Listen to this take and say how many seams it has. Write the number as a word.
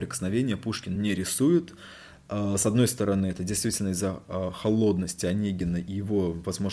zero